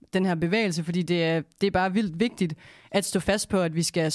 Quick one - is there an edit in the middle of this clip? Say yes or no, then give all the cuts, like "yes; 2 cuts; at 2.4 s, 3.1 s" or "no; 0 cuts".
no; 0 cuts